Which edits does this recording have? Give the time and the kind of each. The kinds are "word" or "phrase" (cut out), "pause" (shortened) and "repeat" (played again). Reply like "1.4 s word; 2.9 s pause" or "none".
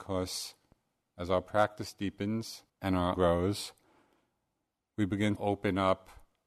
2.7 s pause; 3.1 s word; 5.4 s word